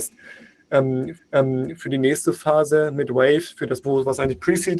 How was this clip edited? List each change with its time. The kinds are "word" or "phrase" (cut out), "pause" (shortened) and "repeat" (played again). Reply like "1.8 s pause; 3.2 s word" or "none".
1.2 s repeat; 3.8 s word